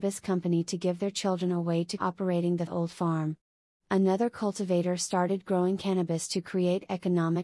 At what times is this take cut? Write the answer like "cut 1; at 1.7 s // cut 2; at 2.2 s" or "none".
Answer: cut 1; at 2.0 s // cut 2; at 2.7 s

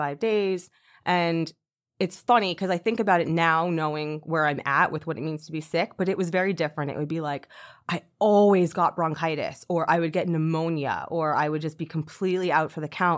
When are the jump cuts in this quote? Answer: none

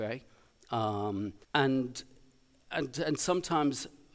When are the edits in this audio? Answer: cut 1; at 1.4 s

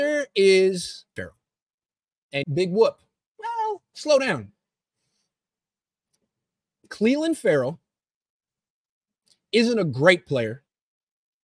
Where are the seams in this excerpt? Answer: cut 1; at 1.2 s // cut 2; at 2.4 s

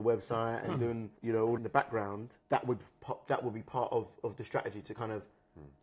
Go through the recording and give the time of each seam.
cut 1; at 1.2 s // cut 2; at 1.6 s // cut 3; at 2.4 s // cut 4; at 4.2 s

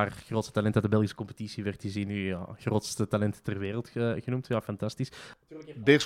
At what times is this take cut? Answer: none

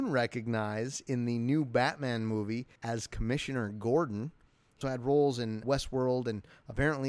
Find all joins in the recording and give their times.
cut 1; at 2.8 s // cut 2; at 4.8 s // cut 3; at 5.6 s

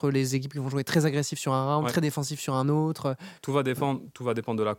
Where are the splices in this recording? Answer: cut 1; at 3.4 s

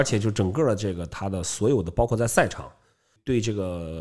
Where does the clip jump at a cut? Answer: none

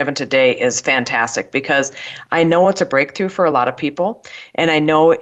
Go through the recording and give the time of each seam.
none

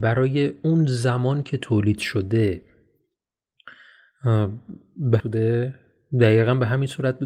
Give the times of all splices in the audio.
cut 1; at 5.2 s

